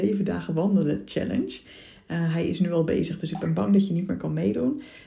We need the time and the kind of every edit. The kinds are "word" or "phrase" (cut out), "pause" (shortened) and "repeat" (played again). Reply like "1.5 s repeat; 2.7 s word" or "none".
none

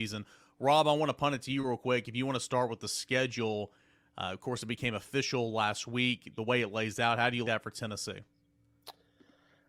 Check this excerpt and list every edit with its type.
7.4 s word

